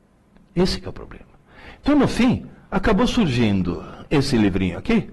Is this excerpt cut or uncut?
uncut